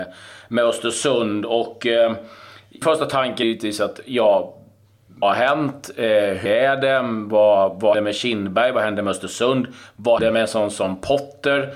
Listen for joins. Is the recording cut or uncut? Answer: cut